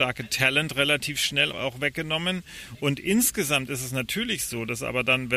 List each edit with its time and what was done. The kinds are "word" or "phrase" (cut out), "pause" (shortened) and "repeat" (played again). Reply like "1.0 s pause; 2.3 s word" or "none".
1.5 s word